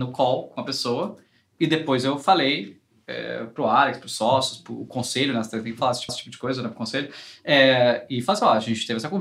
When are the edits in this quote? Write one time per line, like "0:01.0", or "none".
0:06.1